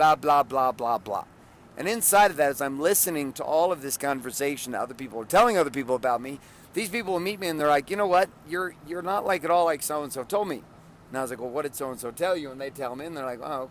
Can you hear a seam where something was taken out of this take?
no; 0 cuts

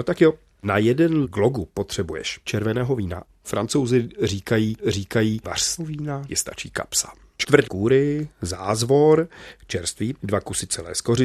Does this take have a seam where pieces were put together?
yes; 6 cuts; at 1.2 s, 2.4 s, 4.8 s, 5.8 s, 6.3 s, 7.6 s

